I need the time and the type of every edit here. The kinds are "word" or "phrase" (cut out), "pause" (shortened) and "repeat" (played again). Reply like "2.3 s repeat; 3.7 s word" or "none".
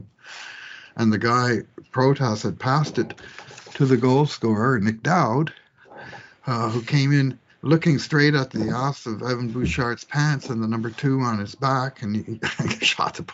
none